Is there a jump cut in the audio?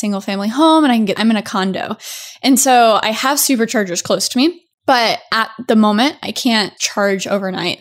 yes; 3 cuts; at 1.2 s, 4.7 s, 6.8 s

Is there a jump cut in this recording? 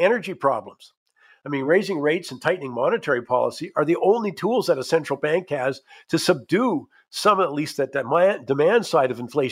no; 0 cuts

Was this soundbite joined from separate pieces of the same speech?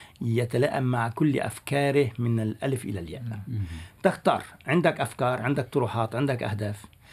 no; 0 cuts

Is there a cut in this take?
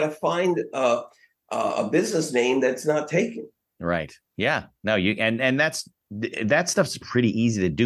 no; 0 cuts

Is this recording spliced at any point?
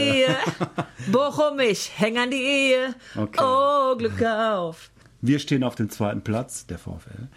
no; 0 cuts

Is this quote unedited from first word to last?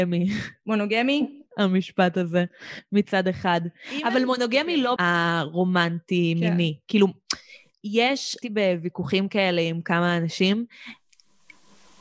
no; 3 cuts; at 1.5 s, 5.0 s, 8.4 s

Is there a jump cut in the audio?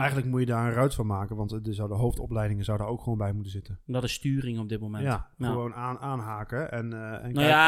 no; 0 cuts

